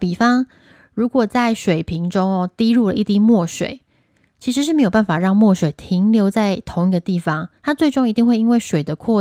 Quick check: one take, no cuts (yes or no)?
no